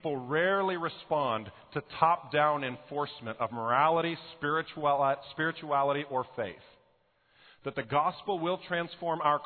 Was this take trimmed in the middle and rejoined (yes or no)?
no